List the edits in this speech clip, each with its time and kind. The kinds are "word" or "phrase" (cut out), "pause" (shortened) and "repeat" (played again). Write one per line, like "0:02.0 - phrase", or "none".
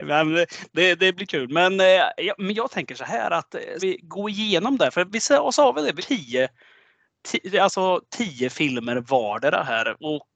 0:03.8 - word
0:05.1 - word
0:06.0 - word